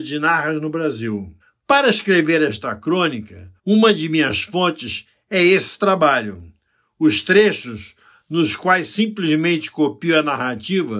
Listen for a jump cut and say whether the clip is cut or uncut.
cut